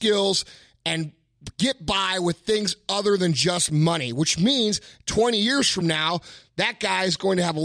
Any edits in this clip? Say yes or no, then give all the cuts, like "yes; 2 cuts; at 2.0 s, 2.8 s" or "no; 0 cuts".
no; 0 cuts